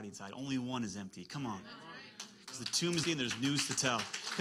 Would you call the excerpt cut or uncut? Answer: cut